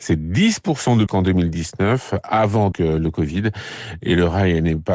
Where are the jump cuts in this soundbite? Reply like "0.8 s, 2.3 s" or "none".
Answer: 1.1 s, 2.7 s